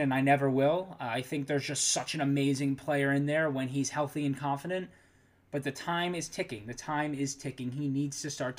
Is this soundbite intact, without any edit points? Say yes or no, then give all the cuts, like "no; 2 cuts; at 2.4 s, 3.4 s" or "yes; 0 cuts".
yes; 0 cuts